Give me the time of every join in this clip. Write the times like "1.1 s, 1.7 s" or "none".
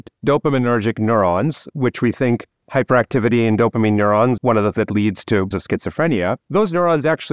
4.4 s, 4.7 s, 5.5 s, 6.4 s